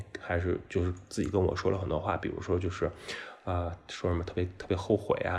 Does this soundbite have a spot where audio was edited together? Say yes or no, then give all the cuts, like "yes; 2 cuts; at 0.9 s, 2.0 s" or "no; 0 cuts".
no; 0 cuts